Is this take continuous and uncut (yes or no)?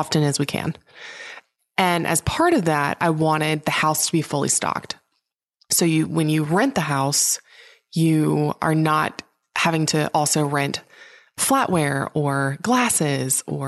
yes